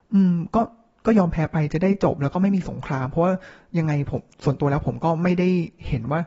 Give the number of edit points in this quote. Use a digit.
0